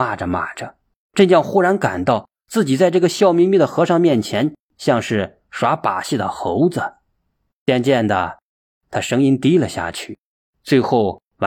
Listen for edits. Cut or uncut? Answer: uncut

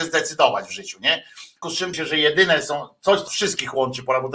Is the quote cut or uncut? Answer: cut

